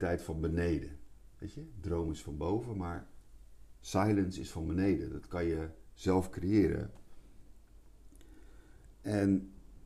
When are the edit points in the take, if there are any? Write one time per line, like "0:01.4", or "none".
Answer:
none